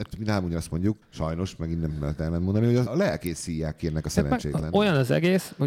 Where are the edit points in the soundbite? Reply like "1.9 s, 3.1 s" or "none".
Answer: 1.0 s, 2.9 s